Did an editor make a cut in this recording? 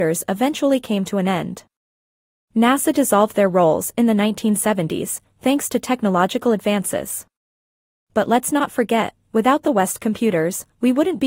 no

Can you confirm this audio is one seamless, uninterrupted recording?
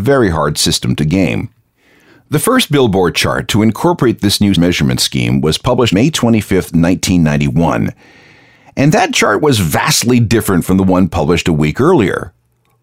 no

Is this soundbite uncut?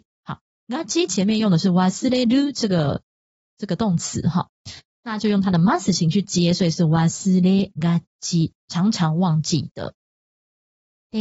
yes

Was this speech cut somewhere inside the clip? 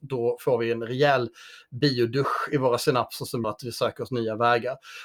yes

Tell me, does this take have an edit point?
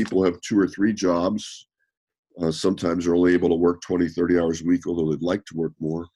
no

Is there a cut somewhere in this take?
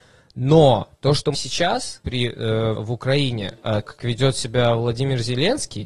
yes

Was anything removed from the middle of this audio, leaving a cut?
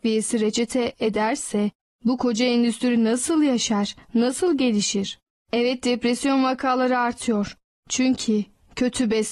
no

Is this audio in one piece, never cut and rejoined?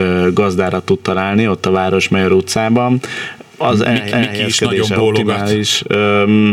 no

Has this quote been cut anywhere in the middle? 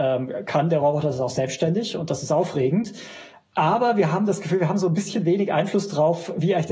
no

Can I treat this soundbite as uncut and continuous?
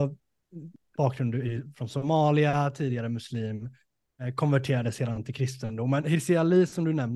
yes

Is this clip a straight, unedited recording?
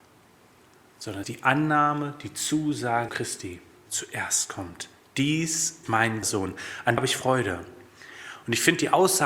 no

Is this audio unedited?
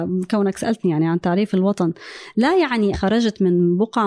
no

